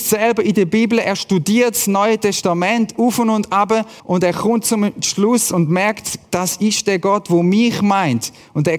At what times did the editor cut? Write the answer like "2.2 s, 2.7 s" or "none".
4.0 s